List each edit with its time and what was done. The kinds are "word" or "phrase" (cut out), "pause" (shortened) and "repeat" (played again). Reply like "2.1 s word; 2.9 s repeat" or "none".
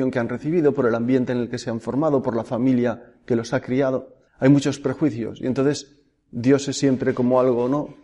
4.3 s pause